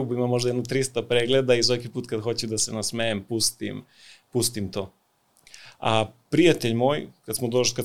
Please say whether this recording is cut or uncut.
uncut